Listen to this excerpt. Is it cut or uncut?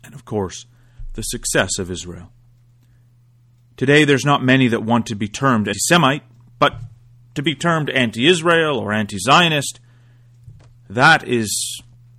cut